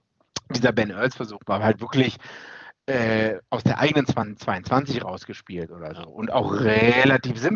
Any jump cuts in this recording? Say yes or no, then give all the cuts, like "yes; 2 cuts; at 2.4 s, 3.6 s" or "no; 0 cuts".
no; 0 cuts